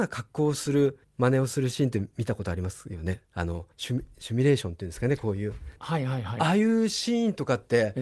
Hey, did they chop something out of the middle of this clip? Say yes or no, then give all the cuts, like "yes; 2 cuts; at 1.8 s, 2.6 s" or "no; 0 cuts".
yes; 4 cuts; at 1.0 s, 3.3 s, 3.7 s, 5.8 s